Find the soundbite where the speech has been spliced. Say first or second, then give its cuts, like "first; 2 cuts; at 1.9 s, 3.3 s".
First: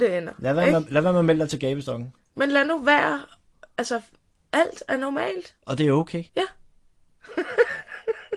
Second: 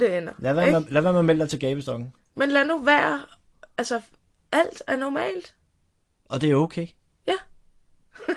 first; 2 cuts; at 5.6 s, 6.3 s